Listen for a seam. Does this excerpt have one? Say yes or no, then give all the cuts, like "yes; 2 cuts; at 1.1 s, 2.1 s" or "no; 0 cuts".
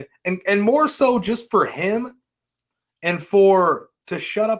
no; 0 cuts